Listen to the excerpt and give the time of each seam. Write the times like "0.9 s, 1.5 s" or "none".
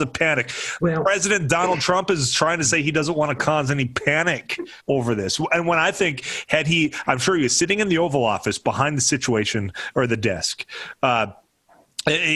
4.8 s